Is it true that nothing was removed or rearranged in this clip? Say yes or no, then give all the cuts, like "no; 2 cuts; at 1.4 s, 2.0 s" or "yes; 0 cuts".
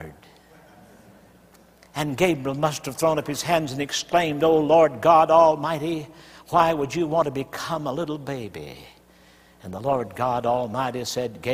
yes; 0 cuts